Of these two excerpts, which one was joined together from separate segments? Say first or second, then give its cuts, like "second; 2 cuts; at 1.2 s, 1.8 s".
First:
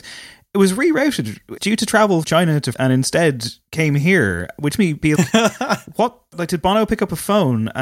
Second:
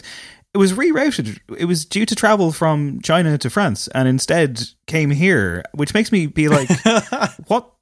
first; 6 cuts; at 1.6 s, 2.2 s, 2.7 s, 4.8 s, 5.2 s, 6.3 s